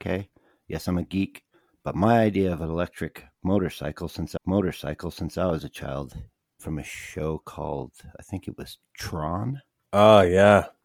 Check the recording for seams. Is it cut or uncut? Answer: cut